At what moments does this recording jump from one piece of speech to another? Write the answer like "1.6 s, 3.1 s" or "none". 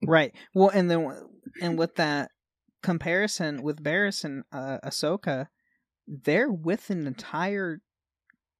none